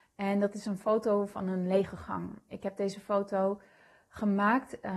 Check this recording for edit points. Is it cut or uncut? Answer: uncut